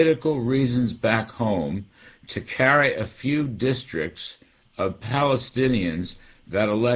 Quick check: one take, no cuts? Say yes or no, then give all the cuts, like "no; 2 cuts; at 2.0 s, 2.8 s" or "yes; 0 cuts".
yes; 0 cuts